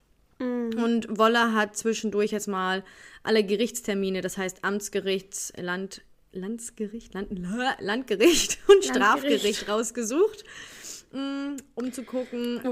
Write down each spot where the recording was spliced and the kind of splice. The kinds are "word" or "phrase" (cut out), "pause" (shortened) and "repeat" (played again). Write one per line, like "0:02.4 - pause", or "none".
none